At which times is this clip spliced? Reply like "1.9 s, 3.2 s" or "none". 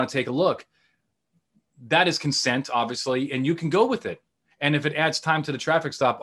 none